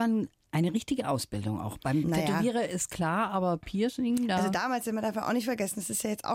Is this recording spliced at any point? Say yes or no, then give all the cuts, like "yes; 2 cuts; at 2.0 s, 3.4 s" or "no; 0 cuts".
no; 0 cuts